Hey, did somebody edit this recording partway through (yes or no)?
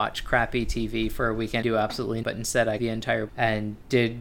yes